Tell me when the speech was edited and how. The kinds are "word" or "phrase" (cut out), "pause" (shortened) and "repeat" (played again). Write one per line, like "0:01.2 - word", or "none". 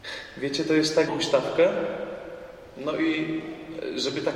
0:01.1 - phrase